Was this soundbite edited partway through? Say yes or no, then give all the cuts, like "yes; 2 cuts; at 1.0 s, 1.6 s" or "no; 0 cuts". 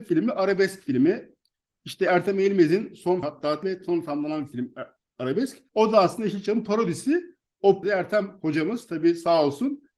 yes; 4 cuts; at 3.2 s, 3.6 s, 5.7 s, 7.8 s